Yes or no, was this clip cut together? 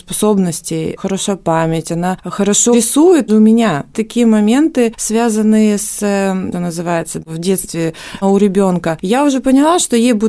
yes